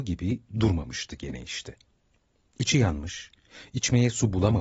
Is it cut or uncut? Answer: uncut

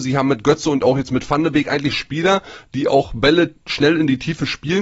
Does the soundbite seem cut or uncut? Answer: uncut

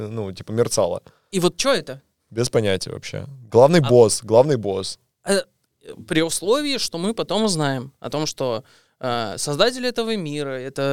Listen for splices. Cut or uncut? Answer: uncut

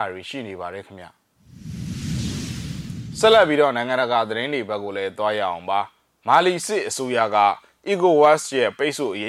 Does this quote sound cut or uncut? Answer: uncut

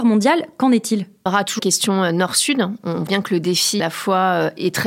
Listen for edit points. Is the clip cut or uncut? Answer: cut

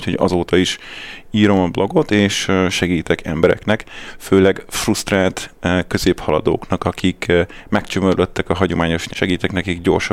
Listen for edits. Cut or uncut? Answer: cut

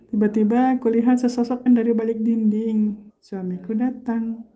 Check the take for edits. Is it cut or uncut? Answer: cut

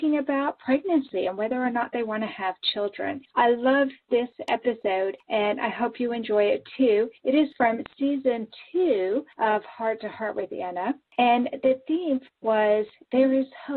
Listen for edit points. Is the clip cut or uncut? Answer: uncut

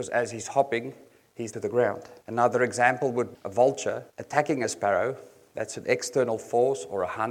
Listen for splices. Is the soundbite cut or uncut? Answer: cut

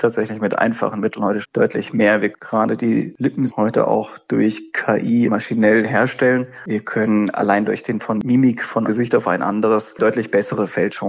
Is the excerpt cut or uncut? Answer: cut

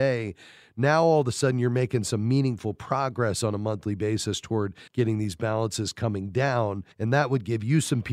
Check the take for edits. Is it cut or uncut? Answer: cut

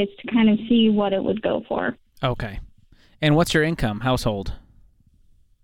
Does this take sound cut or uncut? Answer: uncut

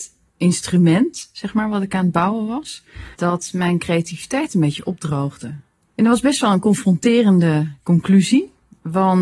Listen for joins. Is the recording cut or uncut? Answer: cut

